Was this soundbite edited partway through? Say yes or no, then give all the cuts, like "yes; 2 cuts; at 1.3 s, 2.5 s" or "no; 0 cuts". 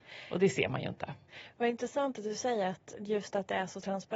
no; 0 cuts